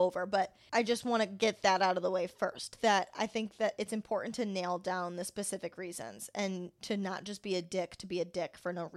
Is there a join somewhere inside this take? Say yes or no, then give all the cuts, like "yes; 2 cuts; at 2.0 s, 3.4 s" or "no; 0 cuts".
no; 0 cuts